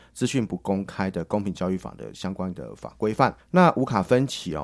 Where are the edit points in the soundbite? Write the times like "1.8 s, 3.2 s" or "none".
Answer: 3.4 s

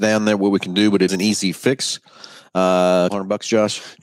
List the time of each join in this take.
1.1 s, 3.1 s

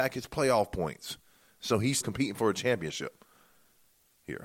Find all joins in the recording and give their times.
2.0 s

